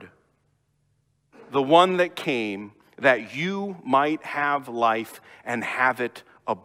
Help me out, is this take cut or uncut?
uncut